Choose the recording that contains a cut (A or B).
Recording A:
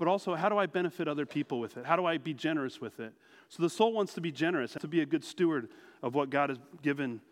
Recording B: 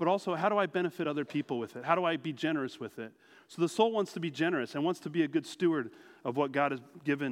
A